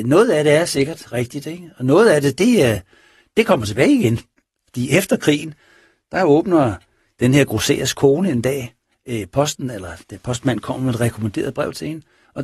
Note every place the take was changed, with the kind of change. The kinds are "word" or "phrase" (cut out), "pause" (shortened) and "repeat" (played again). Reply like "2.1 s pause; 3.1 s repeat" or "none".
none